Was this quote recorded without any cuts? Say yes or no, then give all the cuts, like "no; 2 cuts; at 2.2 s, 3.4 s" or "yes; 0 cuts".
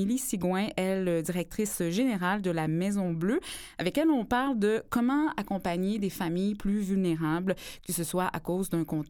yes; 0 cuts